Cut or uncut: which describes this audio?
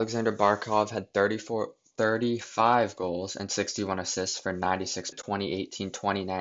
cut